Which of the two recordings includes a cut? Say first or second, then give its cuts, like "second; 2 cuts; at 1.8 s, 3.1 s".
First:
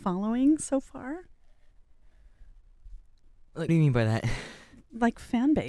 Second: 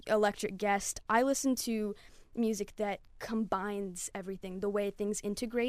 first; 1 cut; at 3.7 s